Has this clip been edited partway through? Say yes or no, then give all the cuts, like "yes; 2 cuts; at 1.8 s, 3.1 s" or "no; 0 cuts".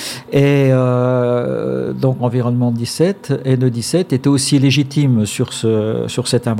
yes; 1 cut; at 2.2 s